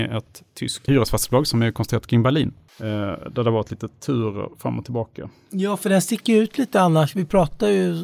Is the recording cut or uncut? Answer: uncut